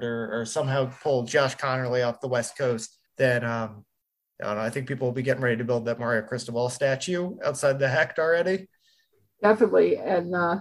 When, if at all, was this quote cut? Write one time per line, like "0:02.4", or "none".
0:03.1